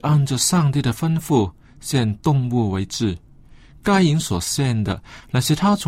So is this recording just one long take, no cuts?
yes; 0 cuts

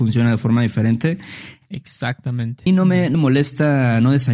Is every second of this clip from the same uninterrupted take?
no; 2 cuts; at 2.7 s, 3.1 s

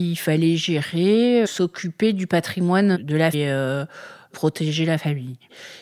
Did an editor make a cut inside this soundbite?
yes; 3 cuts; at 1.4 s, 2.9 s, 3.3 s

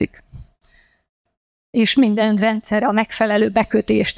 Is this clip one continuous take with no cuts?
yes; 0 cuts

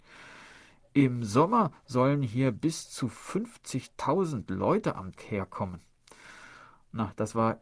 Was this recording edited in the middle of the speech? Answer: yes; 1 cut; at 5.2 s

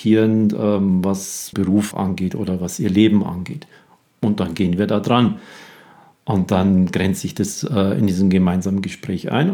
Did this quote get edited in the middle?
yes; 2 cuts; at 1.5 s, 1.9 s

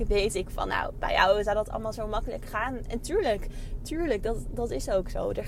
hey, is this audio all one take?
yes; 0 cuts

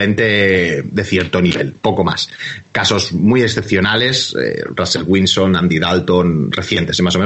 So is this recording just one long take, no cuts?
no; 1 cut; at 1.8 s

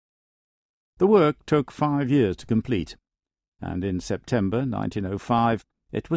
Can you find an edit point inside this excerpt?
no; 0 cuts

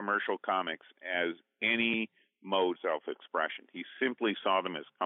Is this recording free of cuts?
no; 1 cut; at 2.7 s

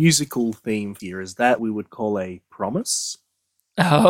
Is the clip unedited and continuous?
no; 2 cuts; at 1.0 s, 1.6 s

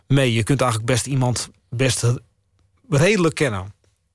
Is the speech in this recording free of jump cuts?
yes; 0 cuts

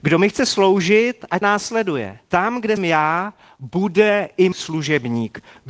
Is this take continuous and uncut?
no; 4 cuts; at 1.4 s, 2.3 s, 2.8 s, 4.5 s

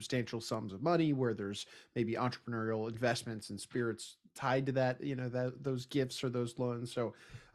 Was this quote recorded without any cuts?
yes; 0 cuts

